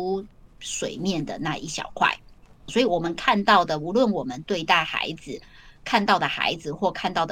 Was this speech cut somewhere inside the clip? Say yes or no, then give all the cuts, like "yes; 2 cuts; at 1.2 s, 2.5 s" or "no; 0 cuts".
yes; 1 cut; at 2.7 s